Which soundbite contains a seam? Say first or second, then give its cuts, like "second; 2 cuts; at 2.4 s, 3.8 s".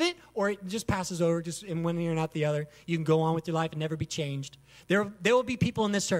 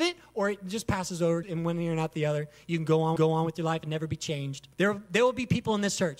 second; 3 cuts; at 1.4 s, 3.2 s, 4.7 s